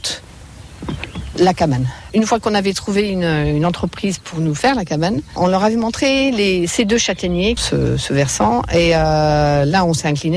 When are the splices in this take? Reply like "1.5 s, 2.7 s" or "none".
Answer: 7.6 s